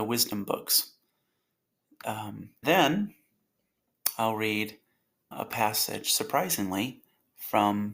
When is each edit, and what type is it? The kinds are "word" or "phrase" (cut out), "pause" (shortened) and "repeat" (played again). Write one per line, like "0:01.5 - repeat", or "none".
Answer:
0:02.6 - word
0:05.3 - word